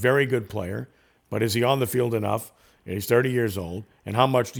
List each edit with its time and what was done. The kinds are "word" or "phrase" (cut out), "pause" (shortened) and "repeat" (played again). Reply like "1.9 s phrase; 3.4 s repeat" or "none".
none